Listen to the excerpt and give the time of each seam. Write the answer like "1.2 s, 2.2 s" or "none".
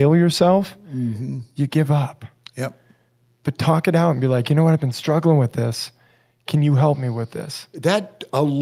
none